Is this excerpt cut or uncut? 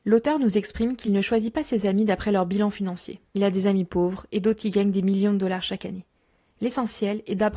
uncut